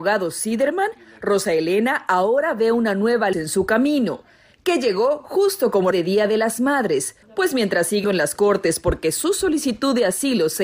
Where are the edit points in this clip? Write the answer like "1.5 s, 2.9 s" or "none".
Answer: 3.3 s, 5.9 s, 7.2 s, 8.0 s